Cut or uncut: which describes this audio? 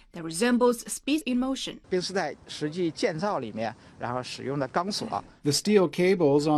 cut